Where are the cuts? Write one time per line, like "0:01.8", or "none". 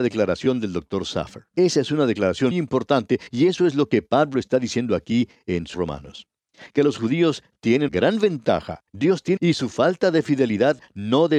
0:01.5
0:02.5
0:05.7
0:07.9
0:08.9
0:09.4